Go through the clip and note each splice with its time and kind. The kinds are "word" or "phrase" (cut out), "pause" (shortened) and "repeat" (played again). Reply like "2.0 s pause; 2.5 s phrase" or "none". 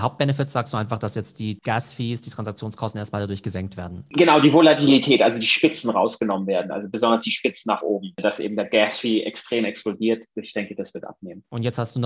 none